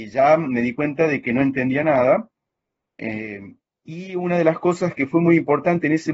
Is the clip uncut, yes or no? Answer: yes